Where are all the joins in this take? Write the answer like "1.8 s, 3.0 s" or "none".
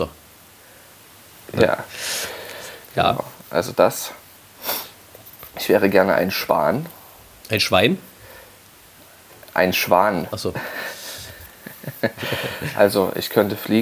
5.5 s